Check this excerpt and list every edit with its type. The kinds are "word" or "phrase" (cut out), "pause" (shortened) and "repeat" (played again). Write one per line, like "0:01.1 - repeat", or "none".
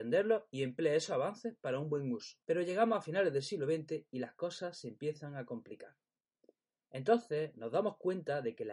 0:02.4 - pause